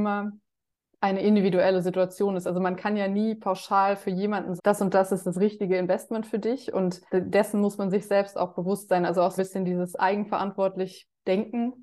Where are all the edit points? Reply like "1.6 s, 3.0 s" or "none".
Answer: 4.6 s, 7.1 s, 9.4 s